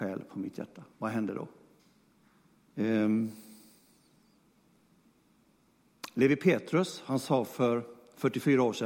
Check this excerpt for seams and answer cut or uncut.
cut